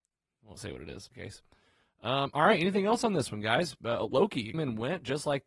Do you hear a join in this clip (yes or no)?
yes